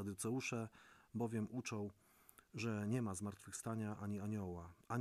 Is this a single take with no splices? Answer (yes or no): yes